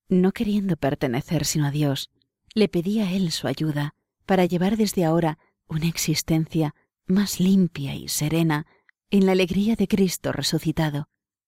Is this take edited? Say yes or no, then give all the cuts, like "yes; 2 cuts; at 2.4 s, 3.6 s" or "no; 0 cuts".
no; 0 cuts